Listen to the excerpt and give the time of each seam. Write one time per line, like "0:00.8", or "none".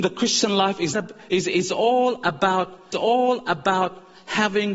0:00.9
0:02.9